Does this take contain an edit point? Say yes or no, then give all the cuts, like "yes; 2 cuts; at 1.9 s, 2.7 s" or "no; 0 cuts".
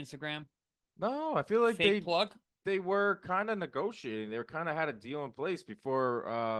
no; 0 cuts